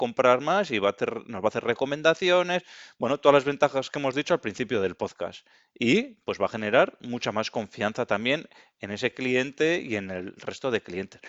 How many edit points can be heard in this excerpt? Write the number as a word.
zero